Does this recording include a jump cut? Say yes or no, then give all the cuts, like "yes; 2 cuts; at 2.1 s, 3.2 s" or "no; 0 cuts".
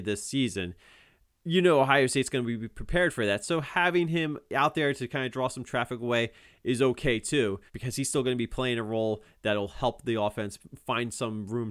yes; 1 cut; at 7.7 s